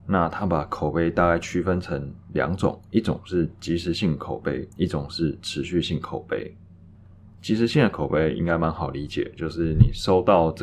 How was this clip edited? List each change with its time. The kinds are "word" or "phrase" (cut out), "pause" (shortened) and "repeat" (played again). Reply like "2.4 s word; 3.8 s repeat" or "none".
4.7 s pause